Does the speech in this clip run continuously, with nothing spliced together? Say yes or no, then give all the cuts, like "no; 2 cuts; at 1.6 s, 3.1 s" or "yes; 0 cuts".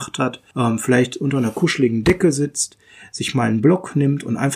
yes; 0 cuts